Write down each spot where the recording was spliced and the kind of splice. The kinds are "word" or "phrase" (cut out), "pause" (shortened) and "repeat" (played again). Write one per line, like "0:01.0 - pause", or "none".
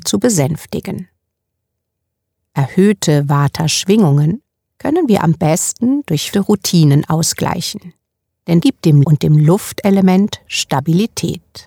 0:06.3 - word
0:08.6 - word
0:09.0 - word